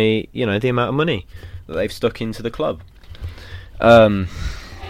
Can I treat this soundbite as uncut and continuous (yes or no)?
yes